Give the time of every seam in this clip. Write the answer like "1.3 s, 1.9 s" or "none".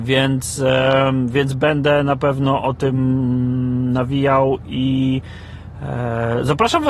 none